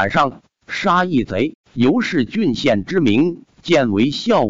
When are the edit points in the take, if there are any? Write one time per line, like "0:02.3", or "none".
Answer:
0:01.6
0:03.5